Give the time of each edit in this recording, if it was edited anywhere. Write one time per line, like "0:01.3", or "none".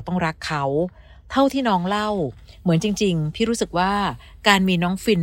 none